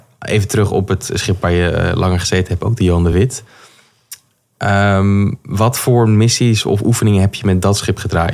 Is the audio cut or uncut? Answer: uncut